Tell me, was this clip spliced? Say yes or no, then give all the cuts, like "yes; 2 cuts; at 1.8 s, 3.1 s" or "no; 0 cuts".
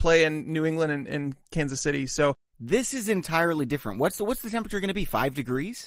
no; 0 cuts